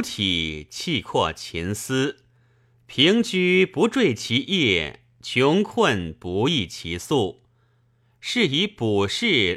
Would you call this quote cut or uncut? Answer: uncut